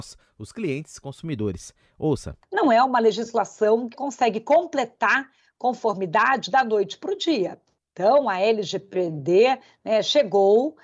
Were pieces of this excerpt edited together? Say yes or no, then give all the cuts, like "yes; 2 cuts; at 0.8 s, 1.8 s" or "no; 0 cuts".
yes; 1 cut; at 3.9 s